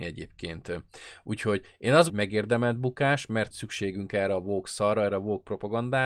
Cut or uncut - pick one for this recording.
cut